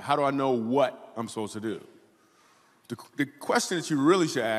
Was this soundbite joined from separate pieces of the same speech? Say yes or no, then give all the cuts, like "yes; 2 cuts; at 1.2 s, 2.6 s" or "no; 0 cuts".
no; 0 cuts